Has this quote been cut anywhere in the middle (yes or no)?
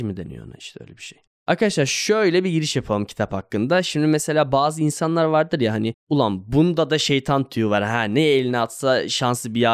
no